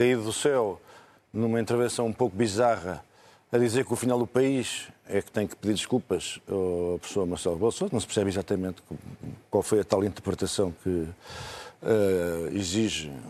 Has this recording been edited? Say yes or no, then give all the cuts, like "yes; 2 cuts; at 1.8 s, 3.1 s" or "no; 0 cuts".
no; 0 cuts